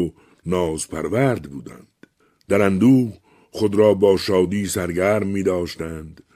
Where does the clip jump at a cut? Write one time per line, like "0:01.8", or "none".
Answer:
0:02.2